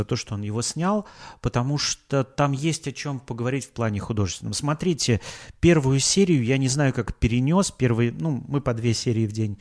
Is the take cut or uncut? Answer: uncut